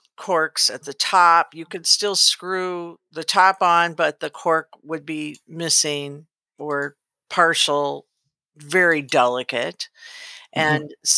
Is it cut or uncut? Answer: uncut